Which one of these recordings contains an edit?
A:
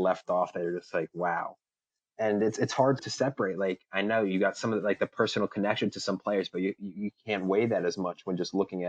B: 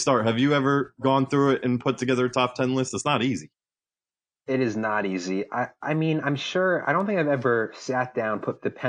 A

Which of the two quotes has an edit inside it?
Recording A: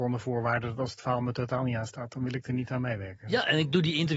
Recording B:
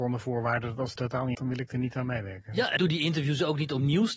B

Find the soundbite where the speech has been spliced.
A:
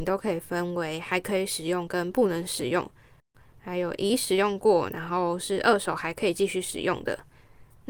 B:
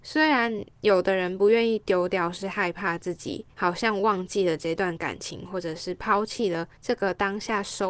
B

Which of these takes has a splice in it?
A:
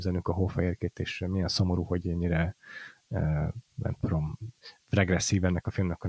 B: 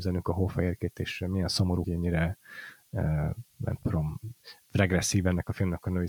B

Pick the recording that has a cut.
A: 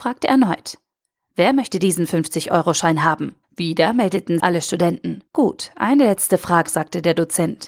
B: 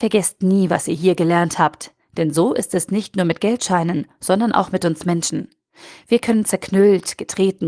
A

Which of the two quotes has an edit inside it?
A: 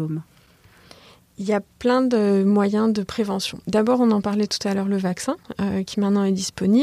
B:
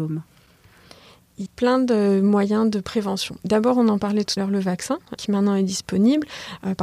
B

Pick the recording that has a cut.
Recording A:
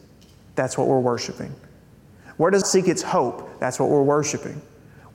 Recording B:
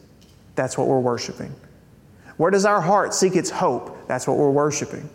A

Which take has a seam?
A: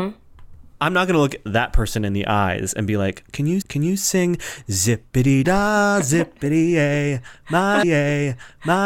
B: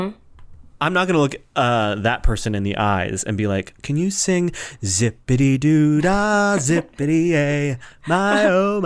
A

